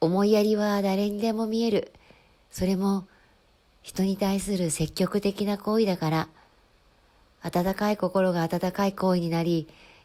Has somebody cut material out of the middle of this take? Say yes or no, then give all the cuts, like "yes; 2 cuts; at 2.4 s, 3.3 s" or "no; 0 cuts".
no; 0 cuts